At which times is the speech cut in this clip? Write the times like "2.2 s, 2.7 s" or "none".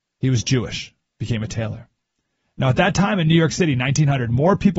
none